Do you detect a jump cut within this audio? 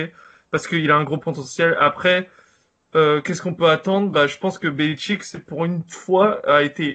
no; 0 cuts

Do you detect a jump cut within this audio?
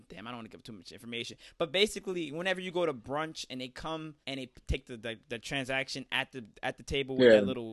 yes; 1 cut; at 4.2 s

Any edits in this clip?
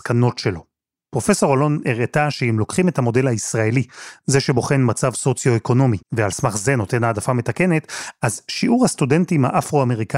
yes; 1 cut; at 6.0 s

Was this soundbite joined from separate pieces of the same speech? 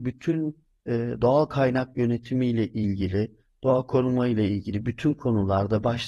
no; 0 cuts

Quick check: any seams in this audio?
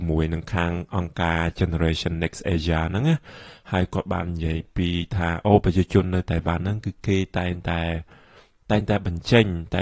no; 0 cuts

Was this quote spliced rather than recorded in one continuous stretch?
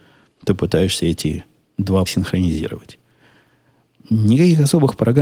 yes; 1 cut; at 2.1 s

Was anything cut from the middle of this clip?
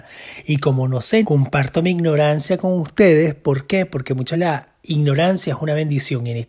yes; 2 cuts; at 1.2 s, 4.3 s

